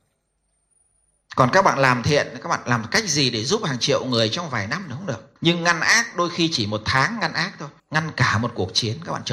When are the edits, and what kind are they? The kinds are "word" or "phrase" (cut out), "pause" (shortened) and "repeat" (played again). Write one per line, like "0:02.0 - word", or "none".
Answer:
0:05.4 - pause
0:07.8 - pause